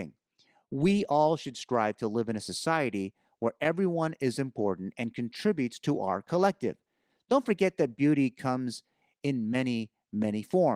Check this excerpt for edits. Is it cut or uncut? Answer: uncut